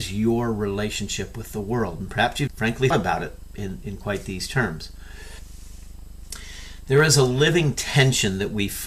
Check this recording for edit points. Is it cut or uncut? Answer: cut